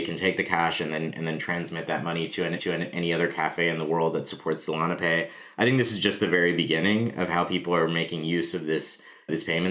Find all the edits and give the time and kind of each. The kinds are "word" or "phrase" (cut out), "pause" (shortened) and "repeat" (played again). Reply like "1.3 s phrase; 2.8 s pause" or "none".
2.6 s repeat